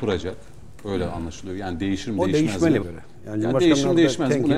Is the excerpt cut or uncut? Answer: cut